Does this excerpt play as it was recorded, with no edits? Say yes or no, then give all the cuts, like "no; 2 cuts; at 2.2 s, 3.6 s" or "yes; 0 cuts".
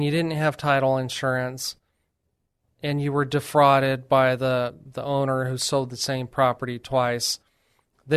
yes; 0 cuts